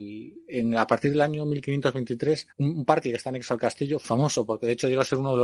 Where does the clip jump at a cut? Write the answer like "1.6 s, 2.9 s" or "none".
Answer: 2.5 s, 4.0 s